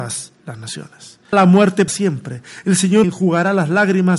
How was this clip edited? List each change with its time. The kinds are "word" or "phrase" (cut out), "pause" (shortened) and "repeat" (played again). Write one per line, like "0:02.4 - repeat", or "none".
0:01.3 - word
0:01.9 - word
0:03.0 - word